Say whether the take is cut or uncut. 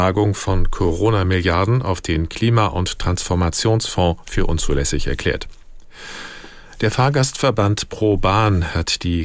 uncut